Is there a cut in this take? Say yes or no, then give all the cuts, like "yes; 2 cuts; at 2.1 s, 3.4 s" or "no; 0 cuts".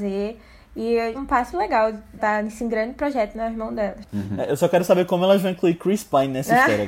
yes; 3 cuts; at 1.1 s, 1.5 s, 2.2 s